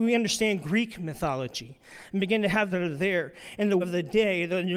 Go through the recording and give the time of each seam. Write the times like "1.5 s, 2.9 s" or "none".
2.7 s, 3.8 s